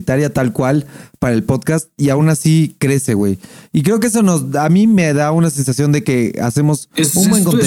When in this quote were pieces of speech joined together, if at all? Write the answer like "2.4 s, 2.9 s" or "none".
none